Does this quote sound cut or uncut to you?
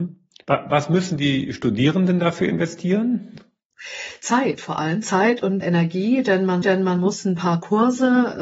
cut